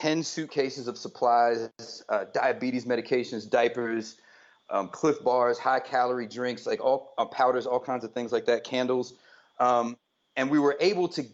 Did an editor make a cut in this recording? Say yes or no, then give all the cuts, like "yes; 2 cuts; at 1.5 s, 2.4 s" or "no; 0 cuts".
no; 0 cuts